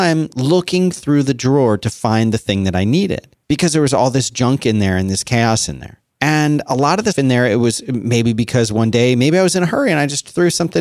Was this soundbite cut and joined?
yes; 3 cuts; at 3.4 s, 6.1 s, 7.1 s

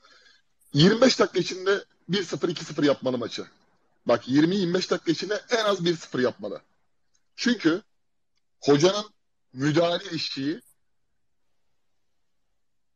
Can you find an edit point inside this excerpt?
no; 0 cuts

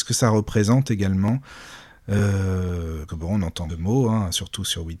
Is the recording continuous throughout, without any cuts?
no; 2 cuts; at 3.1 s, 3.7 s

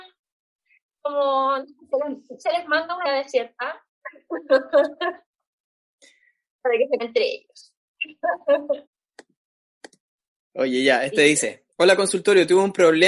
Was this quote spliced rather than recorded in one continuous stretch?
yes; 4 cuts; at 3.0 s, 7.0 s, 8.9 s, 11.7 s

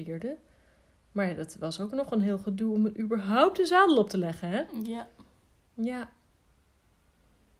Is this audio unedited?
yes; 0 cuts

